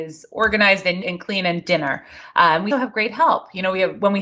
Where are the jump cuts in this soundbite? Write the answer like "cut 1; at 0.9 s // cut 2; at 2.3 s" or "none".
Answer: cut 1; at 1.0 s // cut 2; at 2.7 s